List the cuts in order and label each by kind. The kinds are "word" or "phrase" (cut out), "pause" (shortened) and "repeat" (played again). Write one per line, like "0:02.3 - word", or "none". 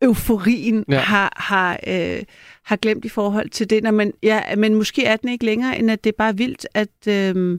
none